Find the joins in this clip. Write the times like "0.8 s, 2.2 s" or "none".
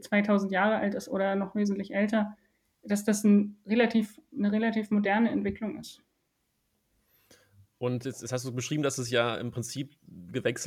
none